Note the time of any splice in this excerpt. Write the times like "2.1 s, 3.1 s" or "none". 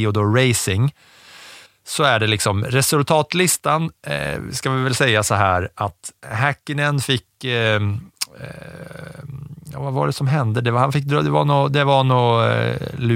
1.7 s, 6.2 s